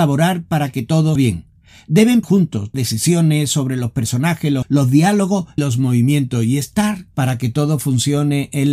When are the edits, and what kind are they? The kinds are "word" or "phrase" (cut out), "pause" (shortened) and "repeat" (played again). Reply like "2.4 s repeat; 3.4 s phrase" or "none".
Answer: 1.2 s word; 2.2 s word; 2.7 s word; 4.6 s word; 5.6 s word; 7.1 s word

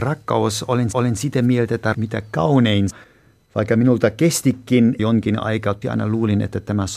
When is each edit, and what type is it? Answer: 0.9 s repeat; 1.9 s phrase; 2.9 s word; 5.0 s word; 5.8 s phrase

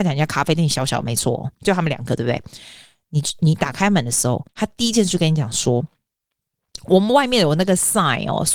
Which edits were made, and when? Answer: 4.5 s pause

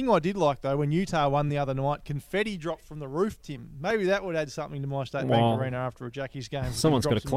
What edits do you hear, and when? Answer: none

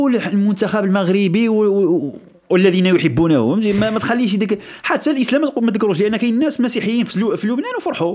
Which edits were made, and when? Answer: none

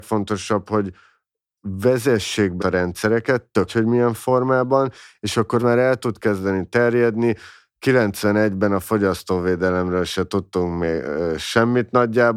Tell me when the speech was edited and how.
2.6 s word; 3.7 s word; 5.6 s word

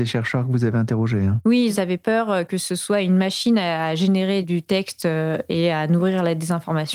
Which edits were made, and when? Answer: none

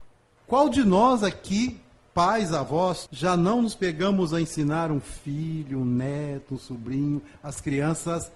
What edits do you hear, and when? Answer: 3.1 s word

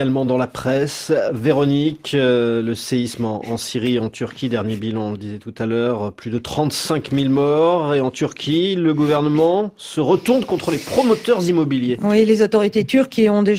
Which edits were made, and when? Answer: none

